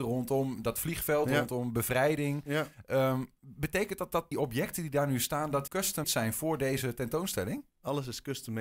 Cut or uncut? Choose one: cut